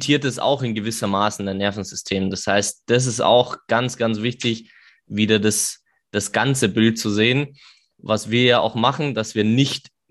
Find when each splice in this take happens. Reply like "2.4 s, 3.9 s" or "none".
none